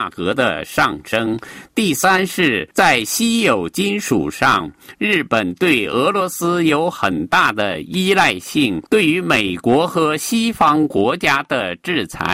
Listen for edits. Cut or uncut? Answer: cut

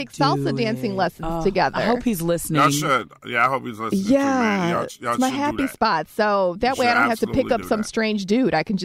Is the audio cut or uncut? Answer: uncut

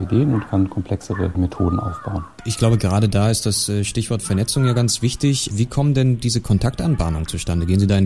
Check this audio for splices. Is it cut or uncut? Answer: uncut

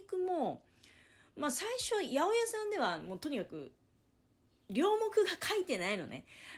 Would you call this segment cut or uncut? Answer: uncut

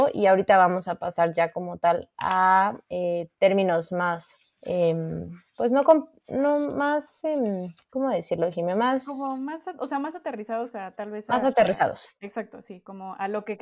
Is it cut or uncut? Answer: cut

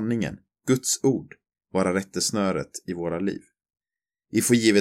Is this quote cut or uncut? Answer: uncut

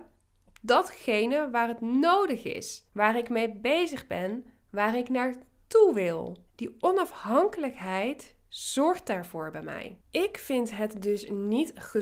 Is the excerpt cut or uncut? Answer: cut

